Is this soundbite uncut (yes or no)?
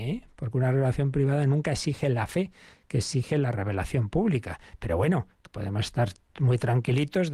yes